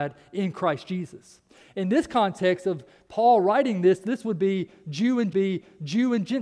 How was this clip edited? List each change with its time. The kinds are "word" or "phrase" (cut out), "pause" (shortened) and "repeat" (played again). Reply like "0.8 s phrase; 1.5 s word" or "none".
5.3 s repeat